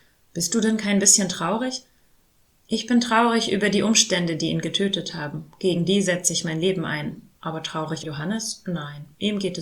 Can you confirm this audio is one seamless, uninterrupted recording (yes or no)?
no